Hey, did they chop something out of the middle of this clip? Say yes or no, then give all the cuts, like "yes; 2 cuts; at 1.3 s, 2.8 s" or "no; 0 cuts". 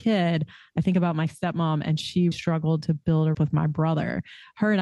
yes; 2 cuts; at 2.3 s, 3.3 s